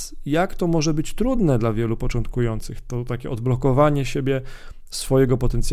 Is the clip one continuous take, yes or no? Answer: yes